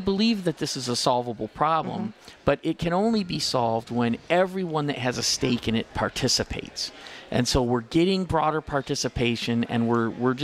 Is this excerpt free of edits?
yes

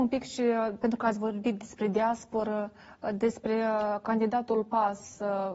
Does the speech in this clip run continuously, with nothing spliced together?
yes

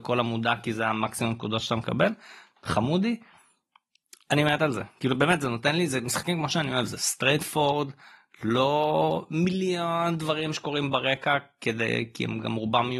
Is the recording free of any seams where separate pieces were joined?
yes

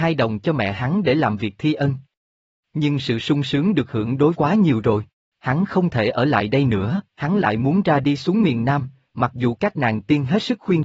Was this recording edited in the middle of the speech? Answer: yes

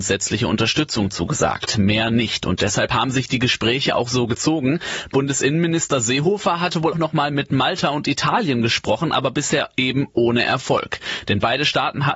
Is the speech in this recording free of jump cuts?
no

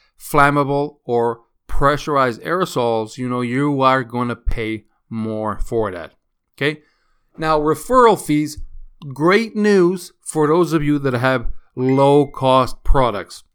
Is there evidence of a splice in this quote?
no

